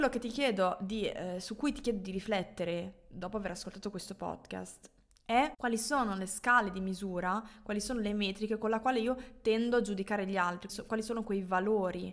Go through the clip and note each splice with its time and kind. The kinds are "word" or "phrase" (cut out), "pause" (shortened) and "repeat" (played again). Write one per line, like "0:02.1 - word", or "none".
0:10.7 - word